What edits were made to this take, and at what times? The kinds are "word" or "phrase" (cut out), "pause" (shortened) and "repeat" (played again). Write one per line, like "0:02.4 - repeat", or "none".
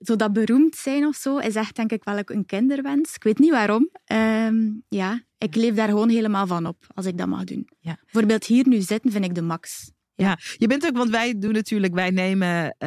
none